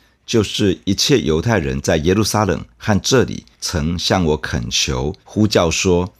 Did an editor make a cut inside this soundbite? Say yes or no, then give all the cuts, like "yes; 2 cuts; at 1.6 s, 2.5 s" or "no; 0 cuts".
yes; 2 cuts; at 3.5 s, 5.2 s